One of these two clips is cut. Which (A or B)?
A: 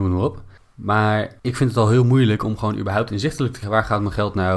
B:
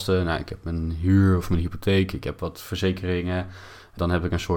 A